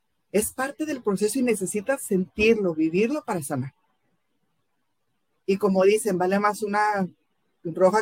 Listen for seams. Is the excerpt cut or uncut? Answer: uncut